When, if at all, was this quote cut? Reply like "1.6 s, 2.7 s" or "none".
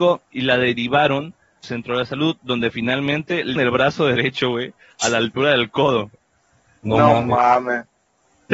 1.6 s, 3.6 s